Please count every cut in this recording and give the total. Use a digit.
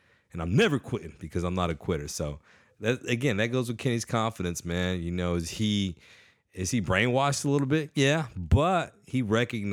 0